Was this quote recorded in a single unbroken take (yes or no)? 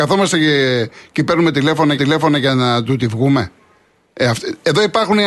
no